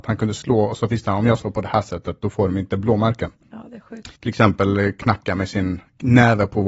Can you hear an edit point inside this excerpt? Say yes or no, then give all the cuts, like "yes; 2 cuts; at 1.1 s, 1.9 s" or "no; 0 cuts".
yes; 1 cut; at 4.1 s